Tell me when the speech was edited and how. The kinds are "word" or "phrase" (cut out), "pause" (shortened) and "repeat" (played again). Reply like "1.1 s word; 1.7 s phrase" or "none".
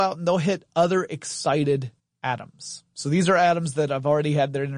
2.0 s pause

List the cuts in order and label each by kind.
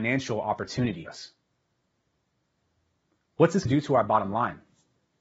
1.1 s word; 3.7 s word

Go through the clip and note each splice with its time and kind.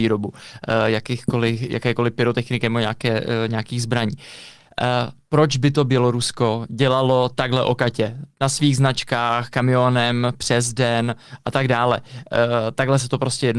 none

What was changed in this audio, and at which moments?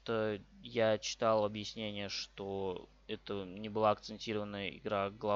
none

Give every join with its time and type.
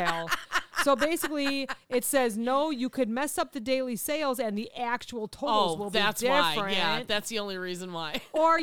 none

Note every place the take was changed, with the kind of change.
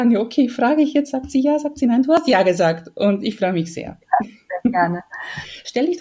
none

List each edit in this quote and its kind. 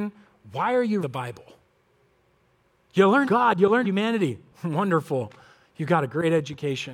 1.0 s word; 3.2 s word; 3.8 s word

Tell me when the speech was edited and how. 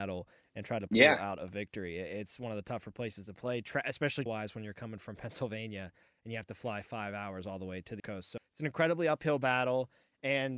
4.3 s word; 8.0 s word; 8.4 s word

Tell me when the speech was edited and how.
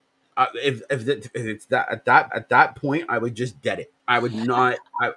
2.3 s repeat; 4.0 s pause

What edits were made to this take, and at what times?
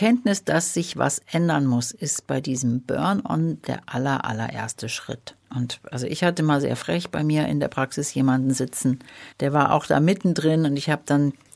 5.4 s pause; 9.3 s pause

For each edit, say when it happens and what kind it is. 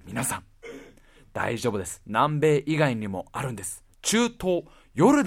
3.9 s pause

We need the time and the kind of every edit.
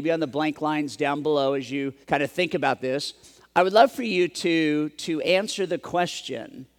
2.0 s pause

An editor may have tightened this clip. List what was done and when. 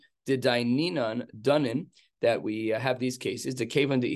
none

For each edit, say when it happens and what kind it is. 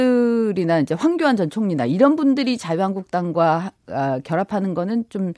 none

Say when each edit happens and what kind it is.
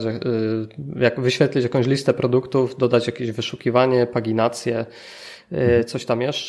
none

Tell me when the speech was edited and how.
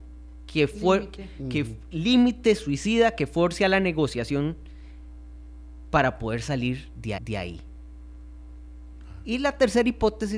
7.2 s repeat

